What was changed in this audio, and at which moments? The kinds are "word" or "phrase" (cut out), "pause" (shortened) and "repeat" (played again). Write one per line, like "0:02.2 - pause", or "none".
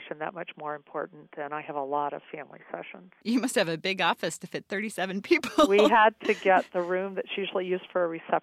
none